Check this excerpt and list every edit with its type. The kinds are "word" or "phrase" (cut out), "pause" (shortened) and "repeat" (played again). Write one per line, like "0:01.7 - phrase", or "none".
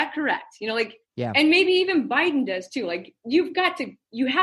0:01.1 - pause